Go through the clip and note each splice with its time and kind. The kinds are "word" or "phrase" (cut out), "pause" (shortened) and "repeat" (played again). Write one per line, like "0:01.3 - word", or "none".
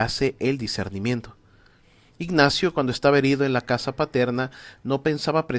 none